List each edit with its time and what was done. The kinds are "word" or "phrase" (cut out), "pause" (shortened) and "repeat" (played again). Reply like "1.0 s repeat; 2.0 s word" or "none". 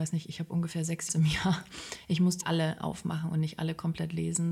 1.1 s phrase; 2.4 s word